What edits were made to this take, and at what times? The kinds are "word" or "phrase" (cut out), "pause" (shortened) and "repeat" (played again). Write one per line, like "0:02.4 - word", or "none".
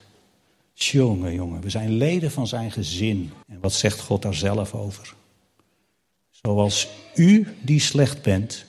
0:03.4 - pause

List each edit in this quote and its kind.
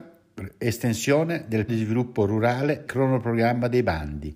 0:01.7 - word
0:02.9 - word

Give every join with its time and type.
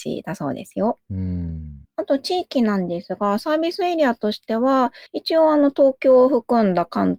0:01.9 - pause
0:05.1 - pause

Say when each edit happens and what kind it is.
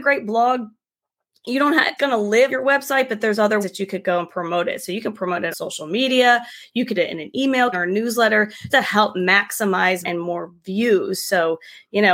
0:02.0 - word
0:02.5 - word
0:03.6 - word
0:05.5 - word
0:07.0 - word
0:07.7 - word
0:08.7 - word
0:10.0 - word

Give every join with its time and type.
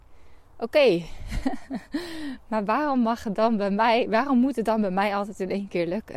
none

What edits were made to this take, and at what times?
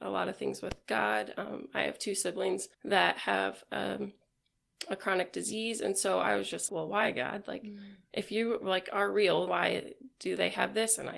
0:02.7 - pause
0:06.7 - word
0:09.5 - word

